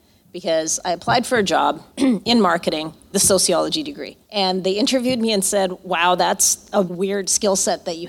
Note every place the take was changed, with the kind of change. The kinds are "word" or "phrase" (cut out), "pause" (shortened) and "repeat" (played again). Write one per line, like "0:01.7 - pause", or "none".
0:01.9 - pause
0:03.1 - word
0:04.2 - pause
0:06.9 - word

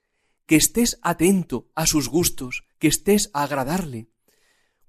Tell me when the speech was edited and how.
0:02.7 - pause
0:03.3 - word

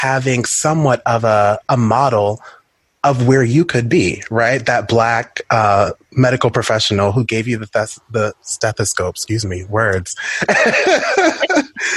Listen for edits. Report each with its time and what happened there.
none

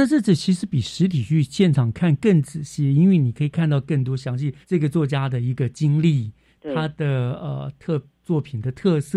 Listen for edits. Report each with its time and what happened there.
0:04.6 - pause

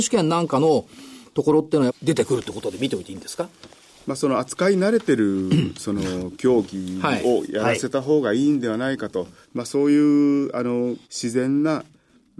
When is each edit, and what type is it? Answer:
0:01.9 - phrase
0:03.9 - pause
0:09.4 - pause
0:11.0 - pause

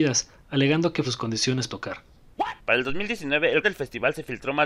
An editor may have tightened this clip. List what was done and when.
0:01.0 - phrase
0:01.7 - word
0:02.6 - pause
0:03.6 - word

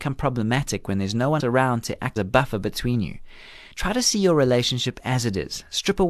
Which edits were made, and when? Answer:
0:01.4 - word
0:02.2 - word

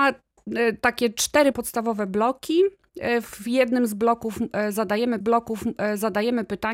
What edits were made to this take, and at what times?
0:01.5 - word
0:05.2 - repeat

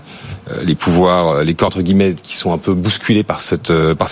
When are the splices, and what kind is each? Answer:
0:01.7 - word

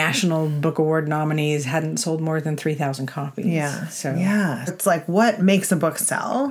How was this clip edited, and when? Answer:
0:04.7 - word

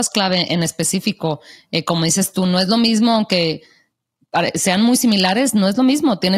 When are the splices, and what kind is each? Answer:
none

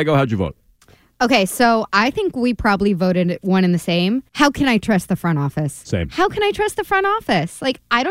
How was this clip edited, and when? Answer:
0:04.3 - pause

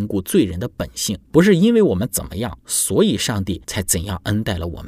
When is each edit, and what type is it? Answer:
0:01.2 - pause
0:02.6 - pause
0:03.6 - pause

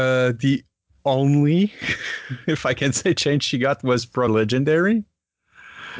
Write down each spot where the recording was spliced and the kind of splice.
0:04.3 - word

